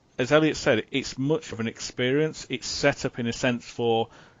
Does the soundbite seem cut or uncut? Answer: cut